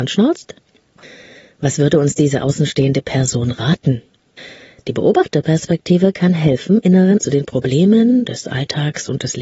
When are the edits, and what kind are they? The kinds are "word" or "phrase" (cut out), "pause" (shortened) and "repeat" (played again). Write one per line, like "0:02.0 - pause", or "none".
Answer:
0:07.2 - word